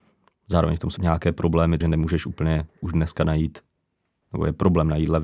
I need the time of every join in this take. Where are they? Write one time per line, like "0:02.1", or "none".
0:01.0
0:01.8
0:04.2